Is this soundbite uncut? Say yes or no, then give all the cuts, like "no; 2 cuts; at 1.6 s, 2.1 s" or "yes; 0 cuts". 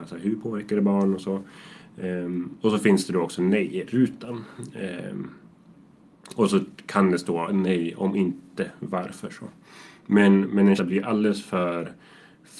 no; 2 cuts; at 10.4 s, 10.8 s